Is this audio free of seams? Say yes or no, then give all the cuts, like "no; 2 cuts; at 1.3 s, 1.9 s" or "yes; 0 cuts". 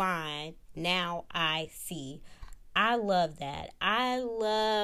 yes; 0 cuts